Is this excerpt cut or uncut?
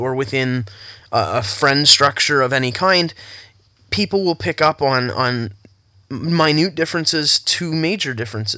uncut